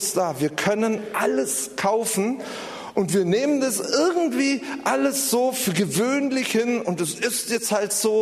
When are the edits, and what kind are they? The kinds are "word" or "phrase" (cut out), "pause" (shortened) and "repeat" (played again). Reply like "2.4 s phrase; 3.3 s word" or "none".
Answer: none